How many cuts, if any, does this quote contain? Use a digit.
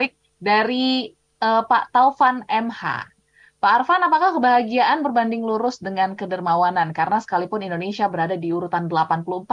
0